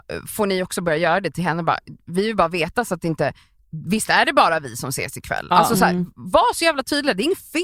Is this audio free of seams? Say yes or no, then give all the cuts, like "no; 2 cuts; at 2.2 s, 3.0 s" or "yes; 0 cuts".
yes; 0 cuts